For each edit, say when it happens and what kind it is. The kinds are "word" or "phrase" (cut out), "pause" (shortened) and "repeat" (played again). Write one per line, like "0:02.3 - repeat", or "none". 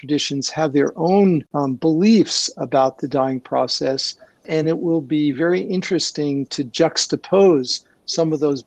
none

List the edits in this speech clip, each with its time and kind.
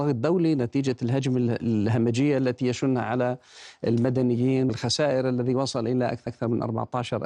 0:04.7 - word
0:06.3 - repeat

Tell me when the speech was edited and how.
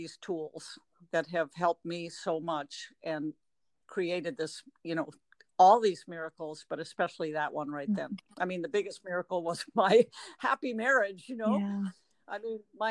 none

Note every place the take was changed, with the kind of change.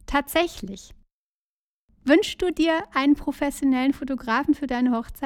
none

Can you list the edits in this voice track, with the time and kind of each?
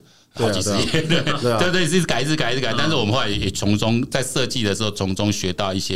none

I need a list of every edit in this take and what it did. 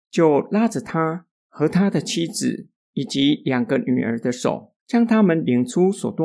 0:04.8 - pause

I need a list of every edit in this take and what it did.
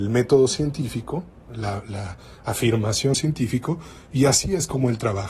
0:03.1 - phrase

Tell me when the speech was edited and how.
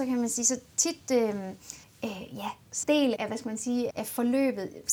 0:01.8 - pause
0:02.8 - word
0:03.2 - word
0:03.9 - word

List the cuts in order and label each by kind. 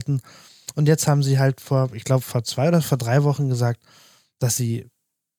none

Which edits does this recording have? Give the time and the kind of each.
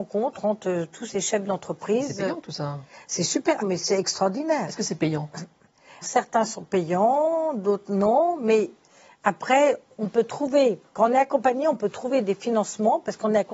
0:03.6 - word
0:06.0 - word

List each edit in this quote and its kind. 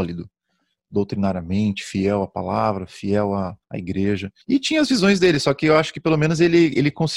0:03.6 - pause
0:04.4 - pause

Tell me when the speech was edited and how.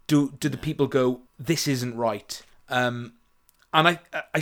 0:01.3 - pause
0:02.5 - pause

